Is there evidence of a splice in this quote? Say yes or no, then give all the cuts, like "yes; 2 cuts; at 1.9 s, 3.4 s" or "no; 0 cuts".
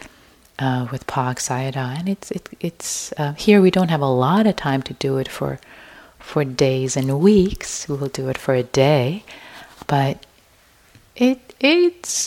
no; 0 cuts